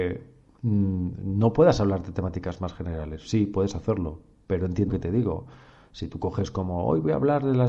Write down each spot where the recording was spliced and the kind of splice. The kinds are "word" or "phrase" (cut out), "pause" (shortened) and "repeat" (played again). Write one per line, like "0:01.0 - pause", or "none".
0:04.9 - word